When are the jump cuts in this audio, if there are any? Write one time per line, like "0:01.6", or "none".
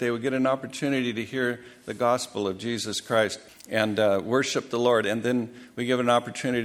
0:03.5